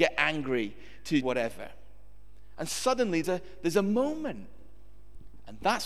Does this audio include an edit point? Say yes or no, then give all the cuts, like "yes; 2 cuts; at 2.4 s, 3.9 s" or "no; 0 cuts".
yes; 2 cuts; at 1.2 s, 3.2 s